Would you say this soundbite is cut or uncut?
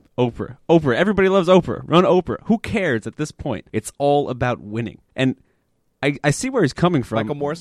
cut